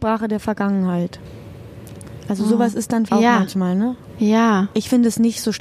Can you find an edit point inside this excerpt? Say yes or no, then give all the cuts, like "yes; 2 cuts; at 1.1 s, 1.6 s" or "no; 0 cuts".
yes; 1 cut; at 3.1 s